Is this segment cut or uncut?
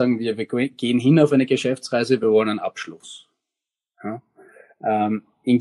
uncut